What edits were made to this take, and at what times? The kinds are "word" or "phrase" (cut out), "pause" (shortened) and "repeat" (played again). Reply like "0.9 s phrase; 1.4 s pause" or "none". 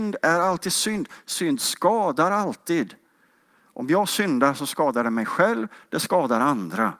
none